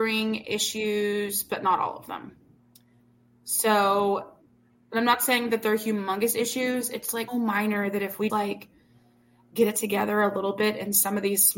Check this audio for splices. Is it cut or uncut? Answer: cut